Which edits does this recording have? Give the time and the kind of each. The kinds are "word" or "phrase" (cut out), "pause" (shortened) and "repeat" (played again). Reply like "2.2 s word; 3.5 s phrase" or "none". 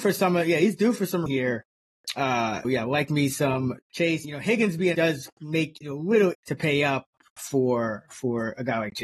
1.3 s word; 2.6 s word; 3.8 s word; 4.2 s word; 4.9 s word; 5.8 s word; 6.3 s word; 7.4 s word